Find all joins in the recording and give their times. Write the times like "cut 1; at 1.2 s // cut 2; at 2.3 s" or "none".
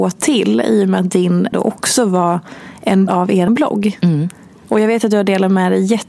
cut 1; at 1.5 s // cut 2; at 3.1 s // cut 3; at 3.5 s